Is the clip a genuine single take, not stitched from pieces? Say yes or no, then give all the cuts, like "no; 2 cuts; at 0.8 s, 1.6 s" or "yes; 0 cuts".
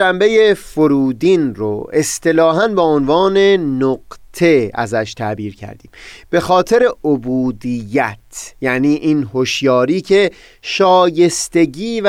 yes; 0 cuts